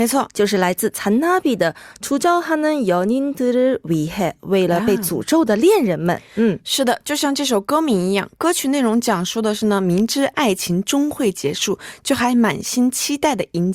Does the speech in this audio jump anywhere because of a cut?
no; 0 cuts

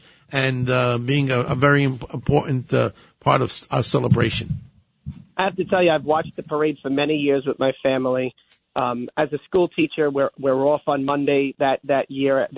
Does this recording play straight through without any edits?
yes; 0 cuts

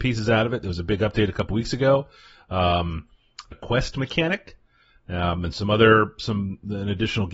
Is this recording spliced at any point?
yes; 1 cut; at 3.5 s

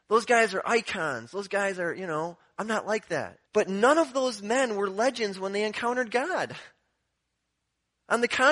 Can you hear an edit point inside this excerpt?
yes; 1 cut; at 3.5 s

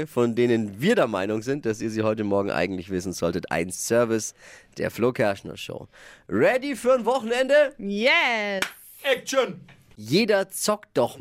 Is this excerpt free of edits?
yes; 0 cuts

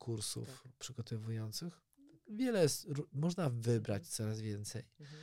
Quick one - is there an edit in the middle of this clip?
no; 0 cuts

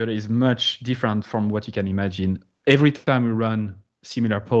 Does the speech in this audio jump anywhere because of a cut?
no; 0 cuts

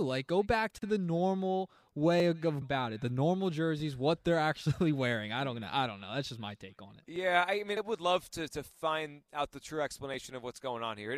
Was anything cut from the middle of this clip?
yes; 2 cuts; at 2.6 s, 7.8 s

